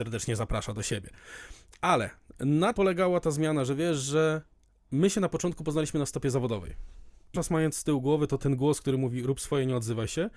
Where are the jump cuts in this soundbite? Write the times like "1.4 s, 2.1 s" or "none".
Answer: 2.7 s, 7.3 s, 8.4 s